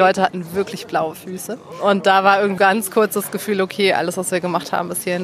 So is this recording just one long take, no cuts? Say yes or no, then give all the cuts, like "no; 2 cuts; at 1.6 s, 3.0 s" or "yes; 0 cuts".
no; 1 cut; at 2.6 s